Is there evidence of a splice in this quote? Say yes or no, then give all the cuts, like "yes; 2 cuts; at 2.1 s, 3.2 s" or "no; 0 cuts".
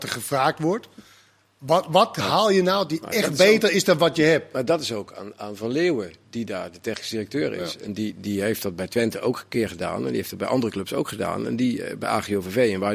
no; 0 cuts